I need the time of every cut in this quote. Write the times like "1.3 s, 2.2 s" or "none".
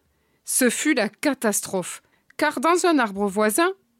2.1 s